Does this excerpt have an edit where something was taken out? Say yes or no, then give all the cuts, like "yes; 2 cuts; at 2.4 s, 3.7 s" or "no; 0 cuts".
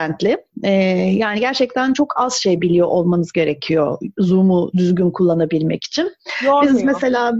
no; 0 cuts